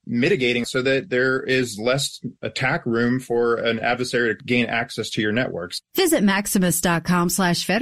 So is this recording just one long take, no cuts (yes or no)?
yes